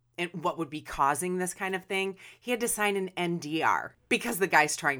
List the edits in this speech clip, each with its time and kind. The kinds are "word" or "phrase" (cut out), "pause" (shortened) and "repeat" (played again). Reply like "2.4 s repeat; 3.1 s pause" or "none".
none